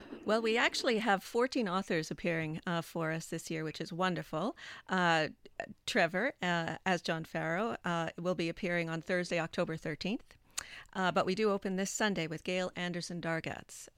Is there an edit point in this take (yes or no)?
no